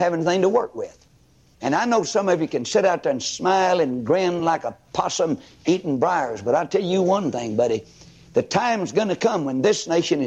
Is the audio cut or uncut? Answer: uncut